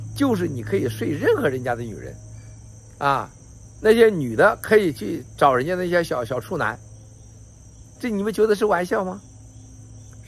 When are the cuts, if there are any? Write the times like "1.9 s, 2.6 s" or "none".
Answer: 7.9 s

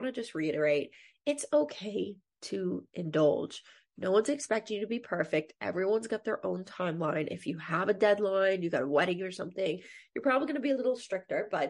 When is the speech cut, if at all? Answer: none

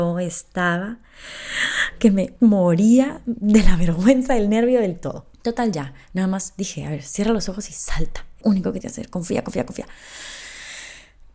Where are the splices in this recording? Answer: 2.4 s, 5.3 s, 8.4 s, 8.8 s

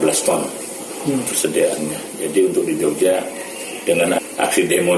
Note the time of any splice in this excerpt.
none

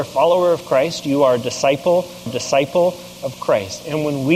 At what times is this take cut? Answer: 2.3 s

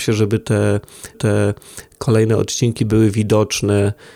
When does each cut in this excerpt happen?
1.1 s

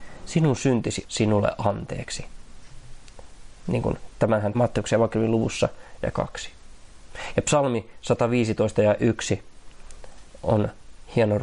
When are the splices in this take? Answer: 1.0 s, 4.5 s, 6.1 s

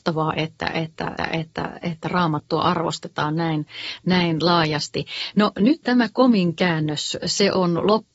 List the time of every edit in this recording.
1.2 s, 5.8 s

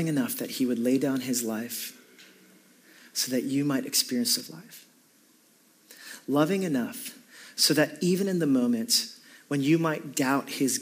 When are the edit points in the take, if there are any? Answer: 4.4 s

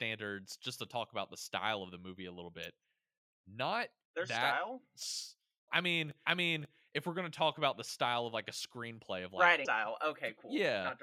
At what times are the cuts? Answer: 5.7 s, 6.3 s, 9.7 s

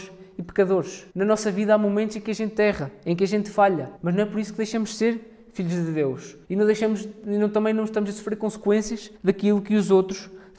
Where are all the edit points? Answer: 1.1 s, 4.0 s, 6.4 s, 9.2 s

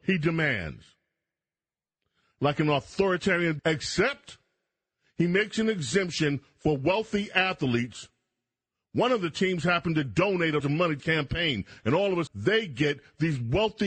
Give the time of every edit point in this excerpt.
3.6 s, 10.6 s, 11.0 s, 12.3 s

